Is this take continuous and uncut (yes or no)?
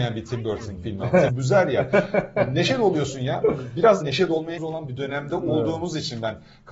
no